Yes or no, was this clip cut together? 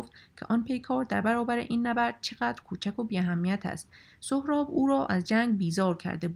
no